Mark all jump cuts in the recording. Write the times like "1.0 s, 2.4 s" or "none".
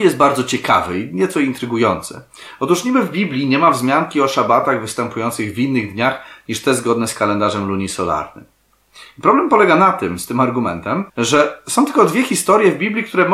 11.1 s